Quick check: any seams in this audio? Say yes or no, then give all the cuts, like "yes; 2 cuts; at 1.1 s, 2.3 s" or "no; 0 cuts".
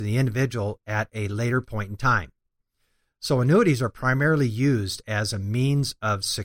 no; 0 cuts